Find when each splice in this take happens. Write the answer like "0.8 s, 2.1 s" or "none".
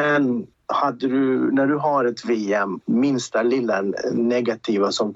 2.8 s